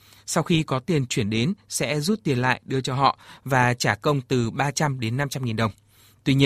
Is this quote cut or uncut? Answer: uncut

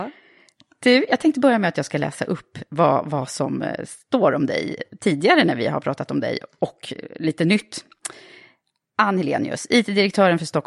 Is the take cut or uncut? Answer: uncut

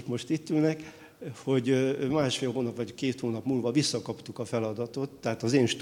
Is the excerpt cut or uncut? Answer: uncut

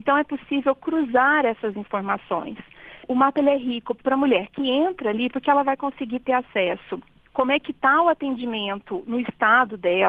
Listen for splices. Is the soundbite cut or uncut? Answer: uncut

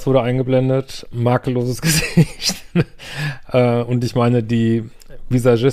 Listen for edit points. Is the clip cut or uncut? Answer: uncut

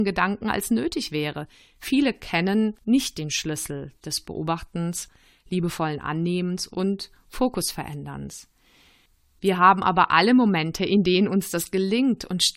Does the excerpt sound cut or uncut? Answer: cut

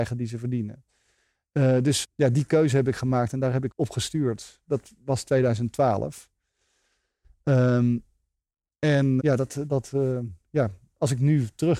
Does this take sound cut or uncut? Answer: cut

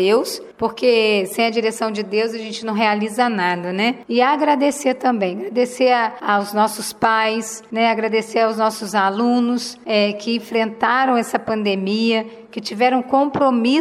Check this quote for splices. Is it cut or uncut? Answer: uncut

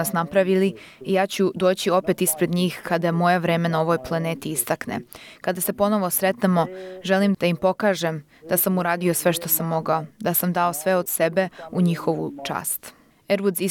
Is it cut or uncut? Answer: cut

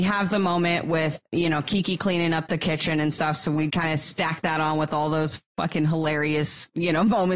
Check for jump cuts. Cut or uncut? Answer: cut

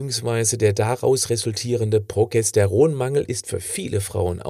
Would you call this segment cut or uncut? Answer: uncut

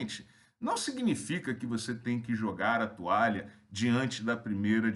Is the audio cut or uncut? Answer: uncut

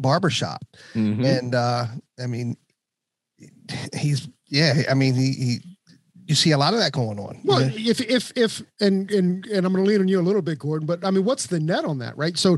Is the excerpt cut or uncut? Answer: uncut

